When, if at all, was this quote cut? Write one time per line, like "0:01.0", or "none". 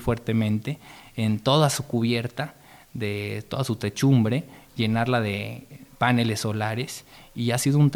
none